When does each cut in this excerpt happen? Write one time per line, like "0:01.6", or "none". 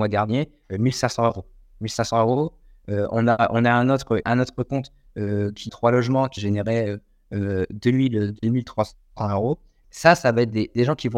0:04.2
0:05.7
0:06.4
0:09.8